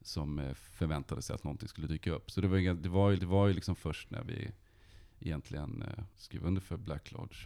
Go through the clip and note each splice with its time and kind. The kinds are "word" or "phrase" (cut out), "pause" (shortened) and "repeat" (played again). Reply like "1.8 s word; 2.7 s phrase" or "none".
3.2 s repeat; 6.1 s pause